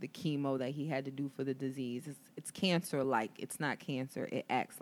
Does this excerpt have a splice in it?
no; 0 cuts

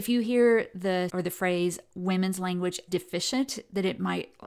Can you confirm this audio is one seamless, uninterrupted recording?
no; 2 cuts; at 1.1 s, 2.9 s

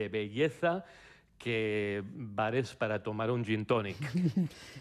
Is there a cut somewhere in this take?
no; 0 cuts

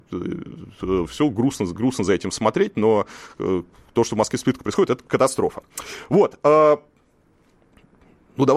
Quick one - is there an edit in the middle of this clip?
no; 0 cuts

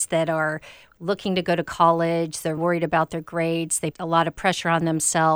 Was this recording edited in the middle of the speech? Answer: yes; 2 cuts; at 2.6 s, 3.9 s

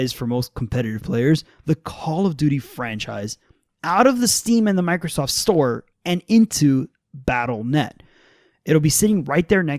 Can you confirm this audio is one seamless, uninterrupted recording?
no; 1 cut; at 5.9 s

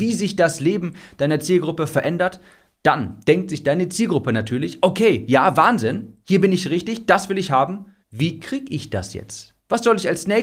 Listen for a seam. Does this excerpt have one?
yes; 2 cuts; at 6.2 s, 8.0 s

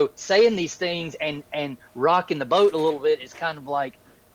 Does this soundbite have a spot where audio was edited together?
no; 0 cuts

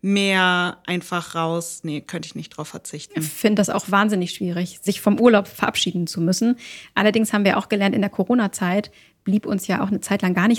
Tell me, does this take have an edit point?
no; 0 cuts

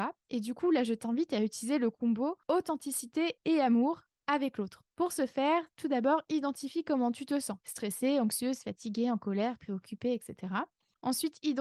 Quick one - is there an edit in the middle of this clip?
yes; 3 cuts; at 2.4 s, 4.9 s, 7.6 s

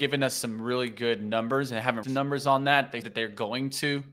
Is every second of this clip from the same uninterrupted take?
no; 2 cuts; at 2.0 s, 3.0 s

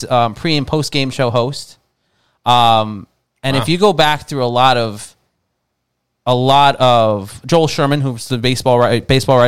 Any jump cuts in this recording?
no; 0 cuts

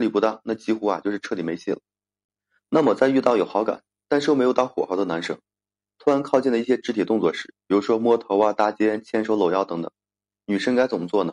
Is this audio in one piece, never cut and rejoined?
yes; 0 cuts

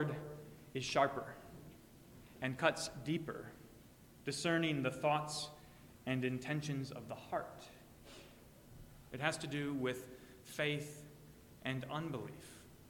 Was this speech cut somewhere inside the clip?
no; 0 cuts

